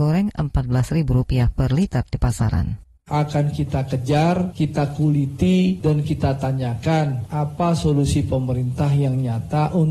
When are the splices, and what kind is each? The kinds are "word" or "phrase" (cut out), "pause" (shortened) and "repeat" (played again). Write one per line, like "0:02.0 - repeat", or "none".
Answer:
0:03.0 - pause